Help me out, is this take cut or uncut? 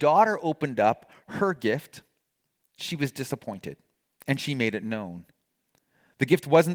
cut